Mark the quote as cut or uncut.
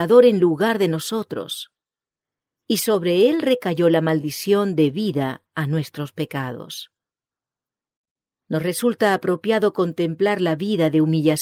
uncut